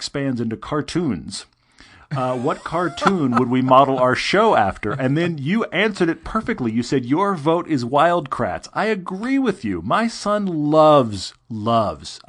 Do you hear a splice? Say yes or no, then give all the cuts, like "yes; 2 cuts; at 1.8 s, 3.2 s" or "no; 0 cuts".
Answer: no; 0 cuts